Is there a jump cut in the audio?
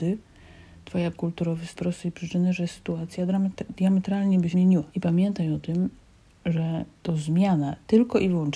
yes; 4 cuts; at 1.1 s, 1.7 s, 4.5 s, 4.9 s

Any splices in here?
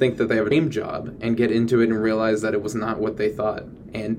no; 0 cuts

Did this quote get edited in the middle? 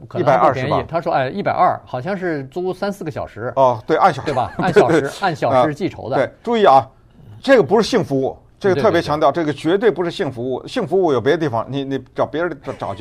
no; 0 cuts

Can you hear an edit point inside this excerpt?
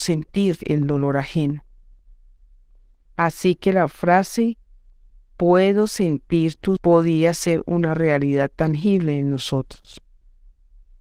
yes; 1 cut; at 6.8 s

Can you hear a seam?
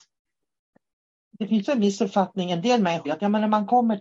yes; 2 cuts; at 1.6 s, 3.0 s

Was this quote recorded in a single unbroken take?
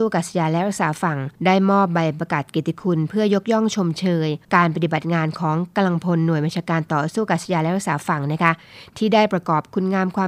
no; 2 cuts; at 1.3 s, 4.4 s

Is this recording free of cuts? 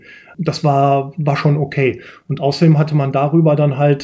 yes; 0 cuts

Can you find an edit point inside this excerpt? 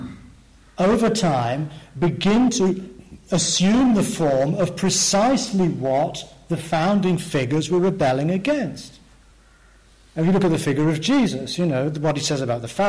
no; 0 cuts

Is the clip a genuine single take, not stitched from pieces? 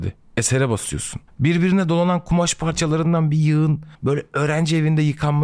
no; 1 cut; at 3.9 s

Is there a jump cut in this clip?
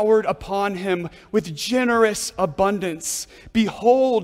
no; 0 cuts

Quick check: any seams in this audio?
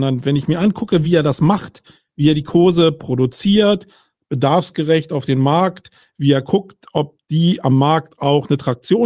no; 0 cuts

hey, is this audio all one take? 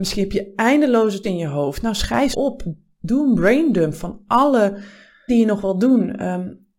no; 3 cuts; at 1.2 s, 2.3 s, 5.3 s

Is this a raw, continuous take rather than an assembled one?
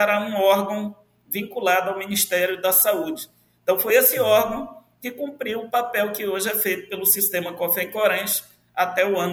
yes; 0 cuts

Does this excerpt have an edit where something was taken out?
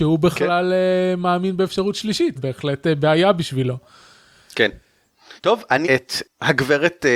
yes; 3 cuts; at 2.3 s, 5.4 s, 5.8 s

